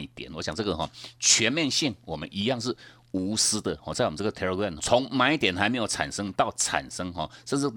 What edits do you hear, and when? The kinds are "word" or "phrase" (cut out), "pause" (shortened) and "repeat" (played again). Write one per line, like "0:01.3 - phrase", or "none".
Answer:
0:04.8 - word